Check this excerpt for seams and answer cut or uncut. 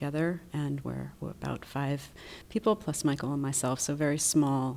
uncut